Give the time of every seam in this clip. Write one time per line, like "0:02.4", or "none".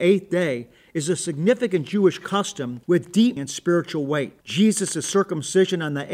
0:02.8
0:03.4
0:04.4